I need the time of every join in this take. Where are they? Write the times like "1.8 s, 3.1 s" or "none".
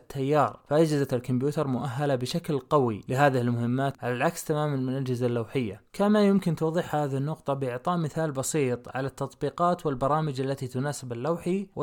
none